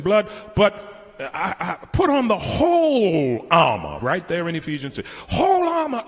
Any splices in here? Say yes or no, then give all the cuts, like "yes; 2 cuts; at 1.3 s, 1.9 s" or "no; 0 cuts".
no; 0 cuts